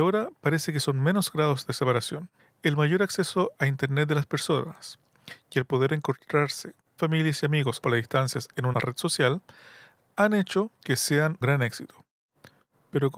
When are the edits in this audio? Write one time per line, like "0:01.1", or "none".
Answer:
0:02.4
0:07.0
0:07.8
0:08.7
0:10.8
0:11.4